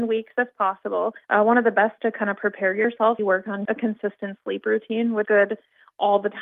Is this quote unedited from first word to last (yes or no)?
no